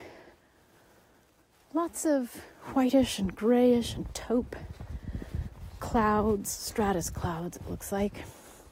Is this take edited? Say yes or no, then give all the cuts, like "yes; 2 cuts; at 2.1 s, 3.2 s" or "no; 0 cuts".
no; 0 cuts